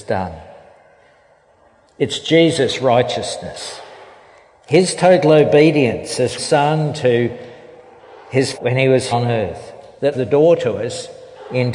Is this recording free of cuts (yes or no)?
no